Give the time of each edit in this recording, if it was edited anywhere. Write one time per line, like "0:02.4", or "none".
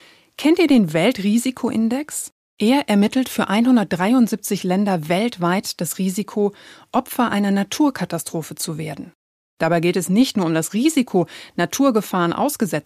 none